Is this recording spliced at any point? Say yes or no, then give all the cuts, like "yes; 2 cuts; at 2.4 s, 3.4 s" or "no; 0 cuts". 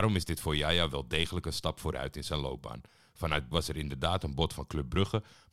yes; 1 cut; at 3.5 s